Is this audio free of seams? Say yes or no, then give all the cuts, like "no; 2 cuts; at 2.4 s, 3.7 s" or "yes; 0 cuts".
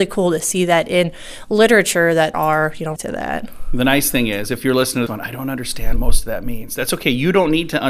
no; 4 cuts; at 2.3 s, 3.0 s, 5.1 s, 6.0 s